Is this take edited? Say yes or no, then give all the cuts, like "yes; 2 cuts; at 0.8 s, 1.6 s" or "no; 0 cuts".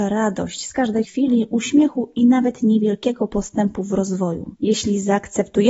yes; 2 cuts; at 1.0 s, 4.5 s